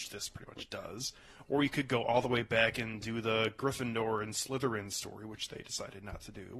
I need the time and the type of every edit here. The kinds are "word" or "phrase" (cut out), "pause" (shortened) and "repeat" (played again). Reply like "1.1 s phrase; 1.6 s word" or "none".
none